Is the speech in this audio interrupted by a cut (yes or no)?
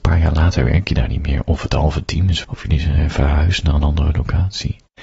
yes